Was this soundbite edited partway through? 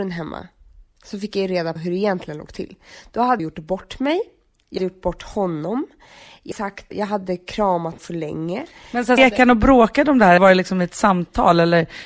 yes; 8 cuts; at 1.8 s, 3.4 s, 4.8 s, 6.5 s, 6.9 s, 8.0 s, 9.2 s, 10.4 s

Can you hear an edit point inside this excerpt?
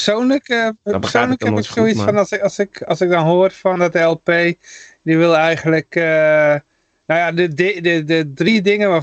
no; 0 cuts

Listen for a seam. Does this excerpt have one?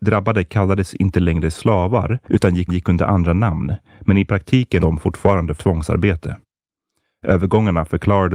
yes; 4 cuts; at 2.2 s, 2.7 s, 4.8 s, 5.6 s

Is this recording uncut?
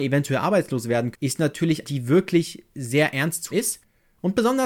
no; 3 cuts; at 1.1 s, 1.8 s, 3.5 s

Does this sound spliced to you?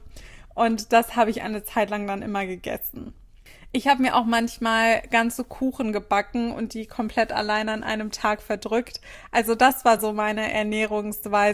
no; 0 cuts

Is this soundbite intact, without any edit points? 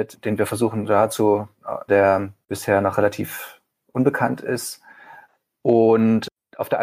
no; 1 cut; at 1.9 s

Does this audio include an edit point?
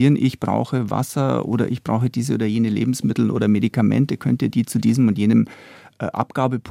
no; 0 cuts

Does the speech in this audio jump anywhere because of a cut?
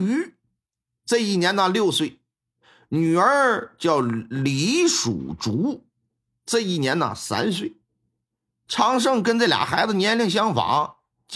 no; 0 cuts

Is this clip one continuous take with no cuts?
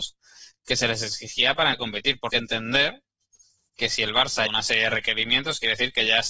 no; 3 cuts; at 1.7 s, 2.3 s, 4.5 s

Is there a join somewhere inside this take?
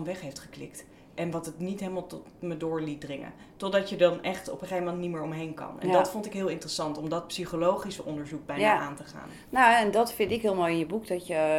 no; 0 cuts

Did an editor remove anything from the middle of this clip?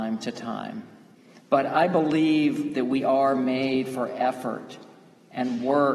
yes; 1 cut; at 1.1 s

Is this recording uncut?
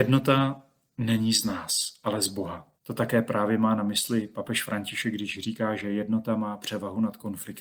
no; 1 cut; at 2.8 s

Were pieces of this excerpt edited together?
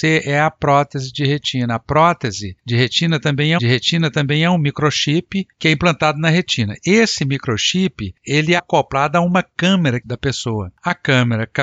yes; 3 cuts; at 3.6 s, 8.6 s, 10.0 s

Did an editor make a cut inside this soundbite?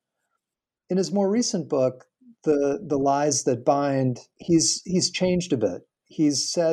no; 0 cuts

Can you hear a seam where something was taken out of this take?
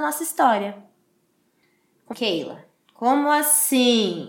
yes; 1 cut; at 2.1 s

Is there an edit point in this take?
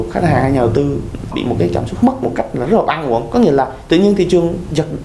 yes; 2 cuts; at 1.3 s, 2.2 s

